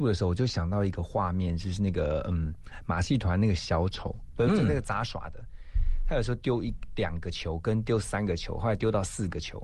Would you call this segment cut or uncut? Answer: uncut